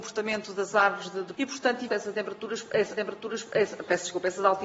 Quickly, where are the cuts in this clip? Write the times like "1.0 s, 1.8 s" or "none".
1.3 s, 1.9 s, 2.9 s